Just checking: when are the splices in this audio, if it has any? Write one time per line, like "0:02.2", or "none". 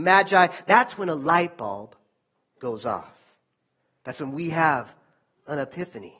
none